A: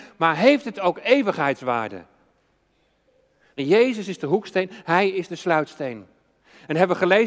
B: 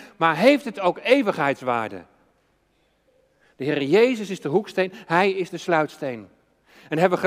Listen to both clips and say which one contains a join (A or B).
A